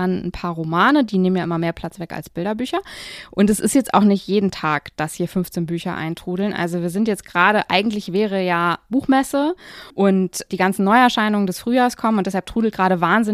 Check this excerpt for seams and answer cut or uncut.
cut